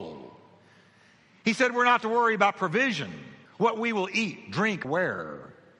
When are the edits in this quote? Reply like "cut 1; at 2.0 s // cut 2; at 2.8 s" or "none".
cut 1; at 3.5 s // cut 2; at 4.8 s